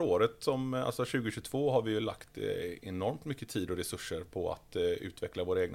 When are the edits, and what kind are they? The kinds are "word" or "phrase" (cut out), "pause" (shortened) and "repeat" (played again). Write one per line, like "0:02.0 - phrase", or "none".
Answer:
none